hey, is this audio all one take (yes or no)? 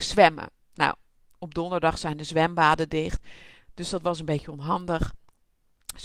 yes